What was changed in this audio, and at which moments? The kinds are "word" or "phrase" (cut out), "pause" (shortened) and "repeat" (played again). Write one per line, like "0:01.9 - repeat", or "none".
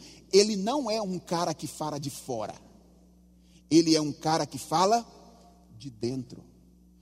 none